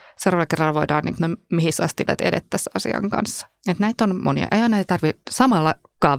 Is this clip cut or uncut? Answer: cut